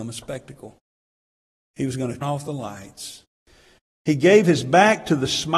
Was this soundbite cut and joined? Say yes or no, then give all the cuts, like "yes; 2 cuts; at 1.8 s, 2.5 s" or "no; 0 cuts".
yes; 1 cut; at 2.2 s